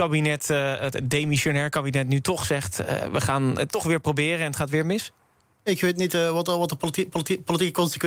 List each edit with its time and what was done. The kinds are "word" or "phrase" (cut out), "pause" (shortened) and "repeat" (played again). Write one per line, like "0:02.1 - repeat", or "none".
0:07.1 - repeat